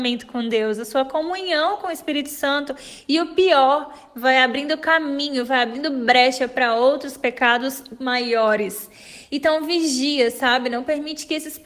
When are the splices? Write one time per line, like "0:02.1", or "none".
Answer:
none